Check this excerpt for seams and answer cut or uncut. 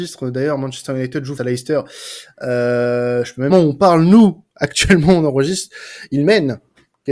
cut